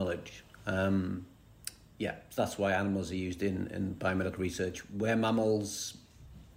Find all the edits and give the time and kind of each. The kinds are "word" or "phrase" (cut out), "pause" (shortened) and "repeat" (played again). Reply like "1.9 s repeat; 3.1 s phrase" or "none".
none